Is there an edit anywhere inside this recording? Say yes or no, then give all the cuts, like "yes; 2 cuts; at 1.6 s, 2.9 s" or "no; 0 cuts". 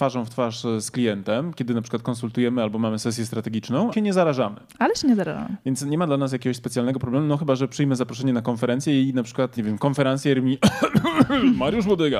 yes; 2 cuts; at 3.9 s, 9.6 s